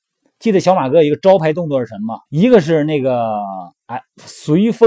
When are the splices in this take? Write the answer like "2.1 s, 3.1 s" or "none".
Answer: 2.3 s